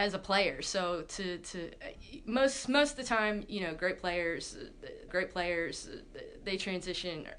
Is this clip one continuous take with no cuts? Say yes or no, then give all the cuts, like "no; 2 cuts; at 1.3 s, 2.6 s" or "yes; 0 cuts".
no; 1 cut; at 5.1 s